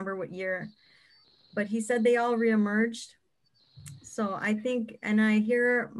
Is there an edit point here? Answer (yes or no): no